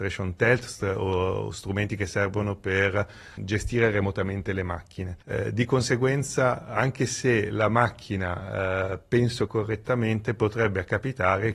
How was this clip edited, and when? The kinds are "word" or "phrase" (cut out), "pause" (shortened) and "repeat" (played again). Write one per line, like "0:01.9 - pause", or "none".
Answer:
0:03.4 - word
0:05.2 - pause
0:09.5 - phrase